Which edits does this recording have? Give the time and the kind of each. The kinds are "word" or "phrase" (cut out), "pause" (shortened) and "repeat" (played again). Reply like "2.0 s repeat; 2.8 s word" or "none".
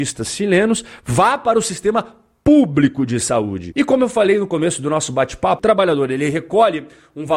none